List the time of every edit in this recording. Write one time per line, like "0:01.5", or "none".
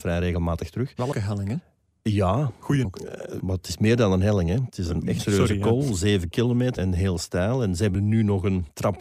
0:01.1
0:02.8
0:03.4
0:04.7
0:05.2
0:06.8
0:07.9